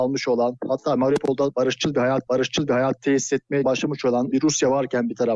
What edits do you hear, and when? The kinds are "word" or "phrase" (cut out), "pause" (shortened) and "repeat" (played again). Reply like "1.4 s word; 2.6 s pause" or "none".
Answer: 2.3 s repeat; 3.6 s phrase; 4.3 s word